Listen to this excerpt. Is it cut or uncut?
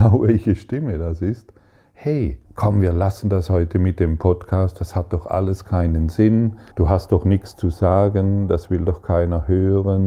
cut